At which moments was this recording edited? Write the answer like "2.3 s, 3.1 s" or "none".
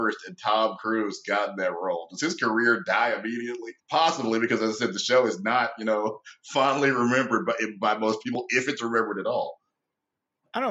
3.8 s

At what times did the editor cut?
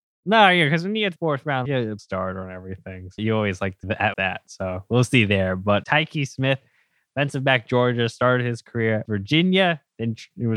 1.2 s, 1.6 s, 2.0 s, 3.2 s, 3.8 s, 4.1 s, 5.8 s, 9.0 s

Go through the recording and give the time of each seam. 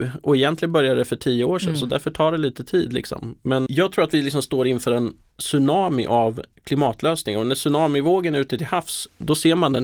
3.7 s

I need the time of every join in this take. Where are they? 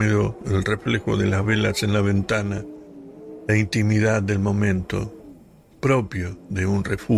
none

